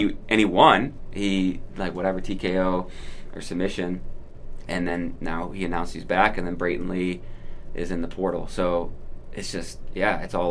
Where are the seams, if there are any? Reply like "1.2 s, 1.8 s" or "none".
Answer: none